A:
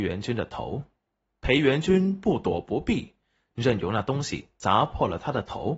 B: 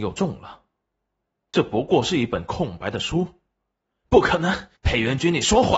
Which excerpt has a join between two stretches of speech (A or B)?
B